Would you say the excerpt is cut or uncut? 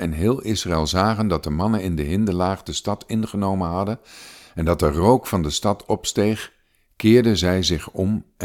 uncut